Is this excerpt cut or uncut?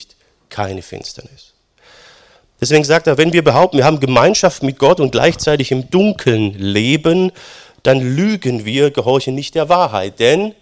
uncut